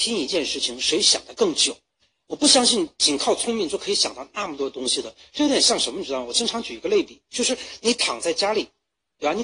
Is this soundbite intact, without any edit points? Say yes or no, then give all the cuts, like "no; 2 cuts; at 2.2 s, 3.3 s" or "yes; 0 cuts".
yes; 0 cuts